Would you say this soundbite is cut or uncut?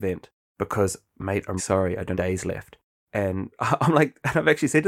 cut